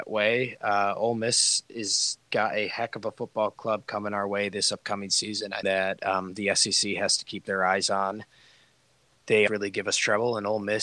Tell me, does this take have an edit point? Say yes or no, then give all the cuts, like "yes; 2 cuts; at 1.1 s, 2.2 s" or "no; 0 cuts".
yes; 3 cuts; at 2.3 s, 5.6 s, 9.5 s